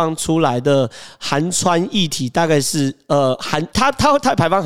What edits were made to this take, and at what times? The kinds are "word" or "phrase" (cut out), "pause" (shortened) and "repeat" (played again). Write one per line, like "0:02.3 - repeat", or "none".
0:03.7 - pause